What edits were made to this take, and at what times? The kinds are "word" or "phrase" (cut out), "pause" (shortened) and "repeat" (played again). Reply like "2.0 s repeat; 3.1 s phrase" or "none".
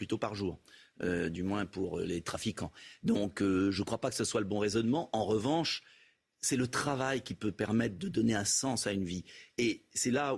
none